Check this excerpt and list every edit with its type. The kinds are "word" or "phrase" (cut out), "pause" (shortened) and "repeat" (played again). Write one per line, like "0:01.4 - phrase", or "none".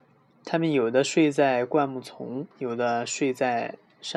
0:02.5 - pause